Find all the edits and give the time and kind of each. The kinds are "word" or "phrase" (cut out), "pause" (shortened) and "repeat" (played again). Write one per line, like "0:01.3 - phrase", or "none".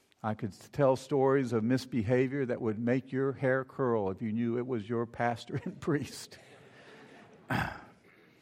none